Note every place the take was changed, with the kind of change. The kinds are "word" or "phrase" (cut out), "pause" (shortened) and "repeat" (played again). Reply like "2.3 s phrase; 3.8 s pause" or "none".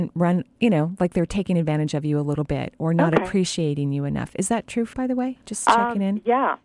4.9 s word